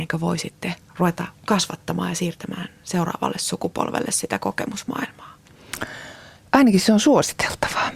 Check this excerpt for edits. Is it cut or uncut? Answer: uncut